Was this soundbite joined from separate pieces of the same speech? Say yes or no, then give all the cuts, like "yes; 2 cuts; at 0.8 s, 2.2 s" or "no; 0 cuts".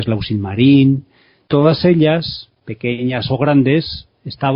no; 0 cuts